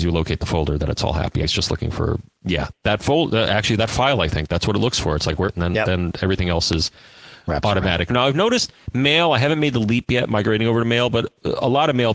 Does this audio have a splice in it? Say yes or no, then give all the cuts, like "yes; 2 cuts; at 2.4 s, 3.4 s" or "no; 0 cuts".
yes; 2 cuts; at 1.4 s, 5.5 s